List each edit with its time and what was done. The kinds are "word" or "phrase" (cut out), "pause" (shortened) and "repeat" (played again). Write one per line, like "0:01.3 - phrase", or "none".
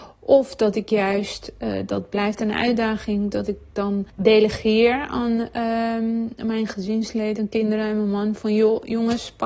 0:04.1 - pause